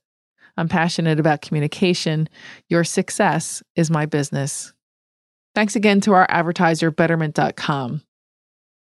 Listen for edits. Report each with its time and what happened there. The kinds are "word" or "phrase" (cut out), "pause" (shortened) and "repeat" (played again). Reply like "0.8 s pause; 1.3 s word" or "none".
none